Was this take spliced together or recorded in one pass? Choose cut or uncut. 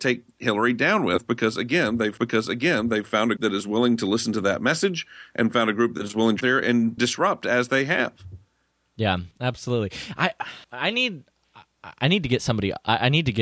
cut